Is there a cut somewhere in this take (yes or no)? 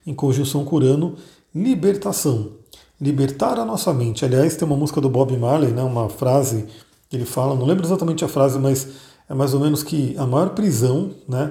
no